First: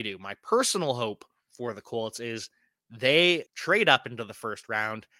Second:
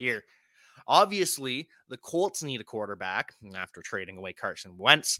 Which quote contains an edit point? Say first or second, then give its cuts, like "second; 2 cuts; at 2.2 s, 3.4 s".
first; 1 cut; at 3.5 s